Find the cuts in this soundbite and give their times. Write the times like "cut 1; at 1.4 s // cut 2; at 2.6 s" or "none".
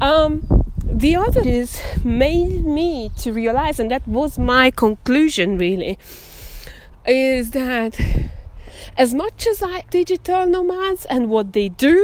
cut 1; at 1.4 s // cut 2; at 9.8 s